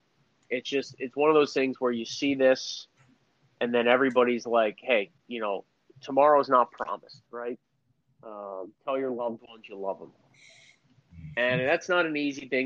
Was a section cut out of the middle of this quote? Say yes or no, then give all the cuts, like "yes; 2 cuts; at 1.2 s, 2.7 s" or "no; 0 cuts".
no; 0 cuts